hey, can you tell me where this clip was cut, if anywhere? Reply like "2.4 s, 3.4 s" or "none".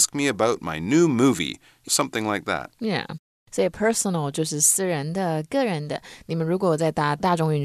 1.9 s